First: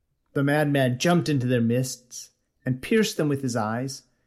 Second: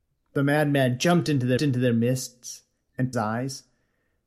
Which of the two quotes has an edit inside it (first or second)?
second